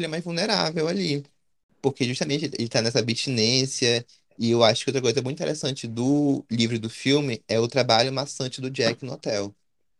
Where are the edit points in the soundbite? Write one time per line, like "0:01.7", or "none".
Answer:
none